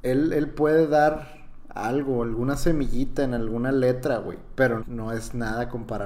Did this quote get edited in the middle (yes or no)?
yes